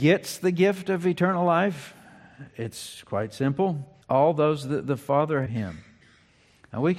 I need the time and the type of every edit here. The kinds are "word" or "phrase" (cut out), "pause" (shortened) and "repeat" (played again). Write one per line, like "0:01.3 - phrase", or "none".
0:04.0 - pause
0:05.5 - phrase